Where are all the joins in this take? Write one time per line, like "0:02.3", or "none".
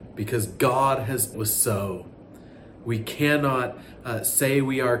0:01.3